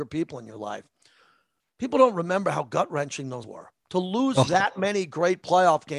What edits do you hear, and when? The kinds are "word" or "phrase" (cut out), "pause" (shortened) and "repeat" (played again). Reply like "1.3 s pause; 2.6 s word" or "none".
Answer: 3.4 s word; 3.8 s pause